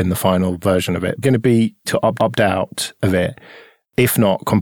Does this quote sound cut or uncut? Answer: cut